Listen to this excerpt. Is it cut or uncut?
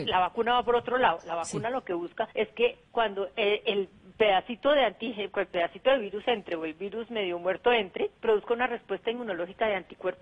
cut